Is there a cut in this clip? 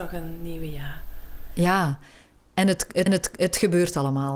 yes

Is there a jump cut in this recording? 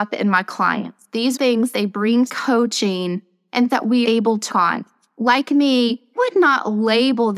yes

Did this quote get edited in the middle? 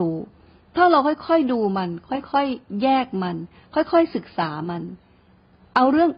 no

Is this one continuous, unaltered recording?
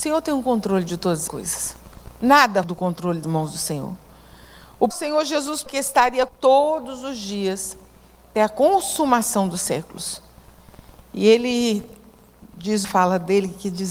no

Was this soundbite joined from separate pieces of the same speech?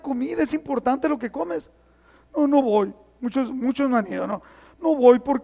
no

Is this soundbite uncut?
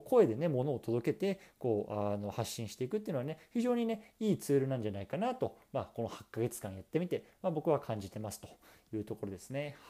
yes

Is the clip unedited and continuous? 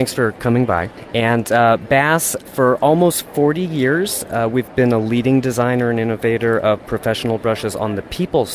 yes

